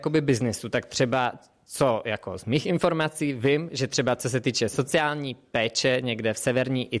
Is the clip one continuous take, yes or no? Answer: yes